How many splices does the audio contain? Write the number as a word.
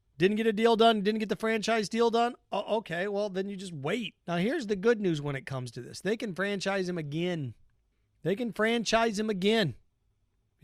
one